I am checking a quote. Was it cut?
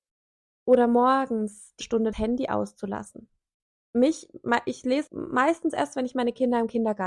yes; 4 cuts; at 1.8 s, 2.1 s, 3.5 s, 5.1 s

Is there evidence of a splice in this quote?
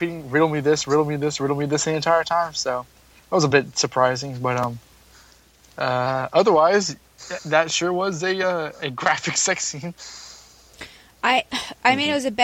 no; 0 cuts

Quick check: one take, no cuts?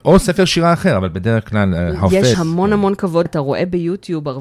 no; 2 cuts; at 2.3 s, 3.3 s

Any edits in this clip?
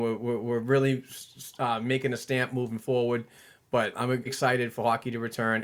yes; 2 cuts; at 3.9 s, 4.3 s

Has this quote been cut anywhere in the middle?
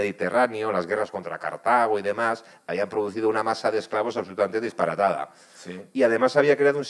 no; 0 cuts

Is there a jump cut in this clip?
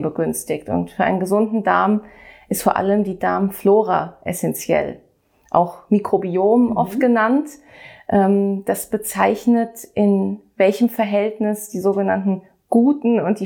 no; 0 cuts

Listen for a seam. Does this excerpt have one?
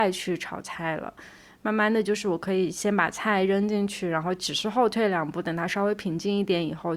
no; 0 cuts

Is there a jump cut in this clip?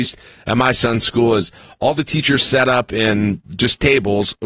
no; 0 cuts

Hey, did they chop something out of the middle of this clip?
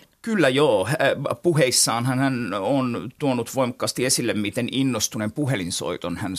no; 0 cuts

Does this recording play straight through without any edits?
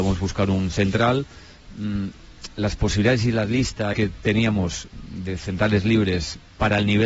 no; 1 cut; at 3.9 s

